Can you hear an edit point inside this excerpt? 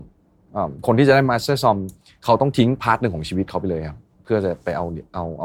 no; 0 cuts

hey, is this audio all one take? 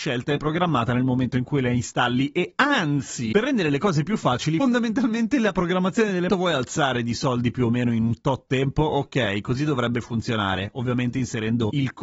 no; 1 cut; at 6.3 s

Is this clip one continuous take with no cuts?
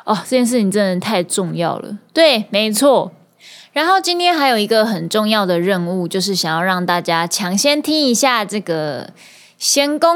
yes; 0 cuts

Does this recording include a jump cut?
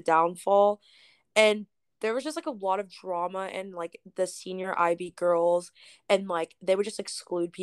no; 0 cuts

